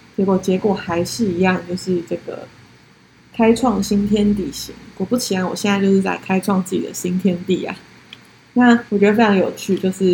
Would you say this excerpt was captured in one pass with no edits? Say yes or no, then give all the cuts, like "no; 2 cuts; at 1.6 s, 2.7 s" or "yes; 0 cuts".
no; 1 cut; at 8.9 s